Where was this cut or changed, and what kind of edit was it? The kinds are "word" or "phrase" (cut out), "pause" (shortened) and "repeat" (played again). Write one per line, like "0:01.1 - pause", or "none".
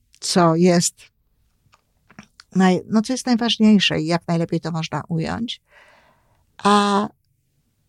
none